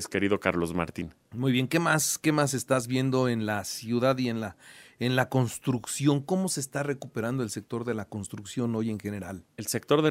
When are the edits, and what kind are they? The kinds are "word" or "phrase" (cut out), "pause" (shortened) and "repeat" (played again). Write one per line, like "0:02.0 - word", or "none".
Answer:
none

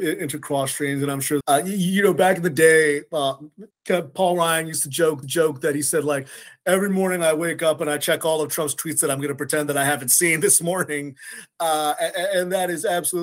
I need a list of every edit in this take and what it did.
0:01.4 - word
0:03.7 - word
0:05.2 - repeat

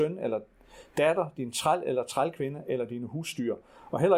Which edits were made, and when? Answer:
none

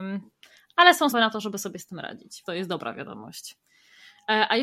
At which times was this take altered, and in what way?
0:01.1 - word
0:02.4 - word

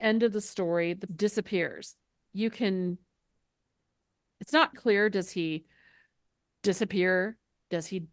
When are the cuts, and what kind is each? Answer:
0:01.1 - word
0:04.7 - word

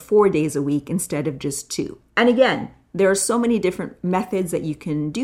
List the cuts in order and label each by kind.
0:02.1 - pause

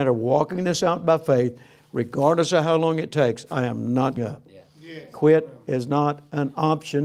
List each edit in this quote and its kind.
0:04.2 - word

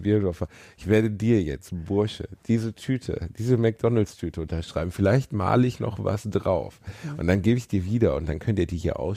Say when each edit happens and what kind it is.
none

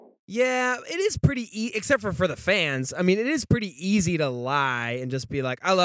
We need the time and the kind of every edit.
none

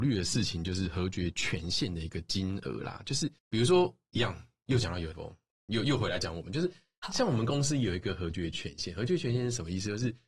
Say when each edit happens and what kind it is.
0:03.4 - pause
0:05.1 - word

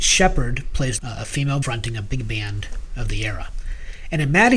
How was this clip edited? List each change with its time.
0:01.0 - phrase
0:01.6 - word

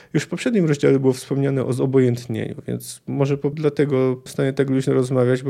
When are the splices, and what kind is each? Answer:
0:03.5 - word
0:04.3 - word

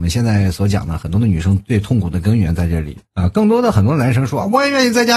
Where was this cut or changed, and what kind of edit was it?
0:03.1 - pause

